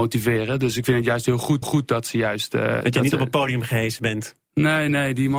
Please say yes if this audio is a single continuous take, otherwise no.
no